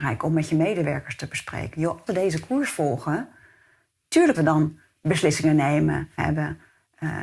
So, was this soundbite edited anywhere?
yes; 3 cuts; at 2.1 s, 4.3 s, 6.2 s

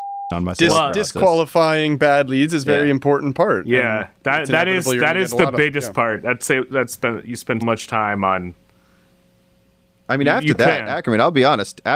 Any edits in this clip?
yes; 1 cut; at 7.6 s

